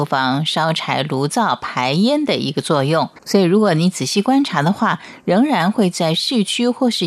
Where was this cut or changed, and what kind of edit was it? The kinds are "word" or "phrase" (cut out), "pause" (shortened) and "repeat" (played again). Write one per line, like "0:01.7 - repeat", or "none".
0:03.2 - pause